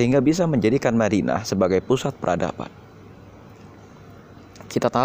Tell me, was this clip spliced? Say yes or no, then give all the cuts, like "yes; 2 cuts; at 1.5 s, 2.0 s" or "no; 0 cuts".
no; 0 cuts